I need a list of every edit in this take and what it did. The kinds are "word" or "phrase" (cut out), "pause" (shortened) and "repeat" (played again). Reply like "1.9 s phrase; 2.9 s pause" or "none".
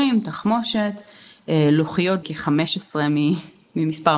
2.2 s word